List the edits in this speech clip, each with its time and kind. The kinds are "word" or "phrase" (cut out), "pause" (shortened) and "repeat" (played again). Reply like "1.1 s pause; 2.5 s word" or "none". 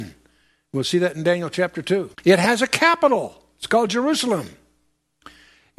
2.1 s pause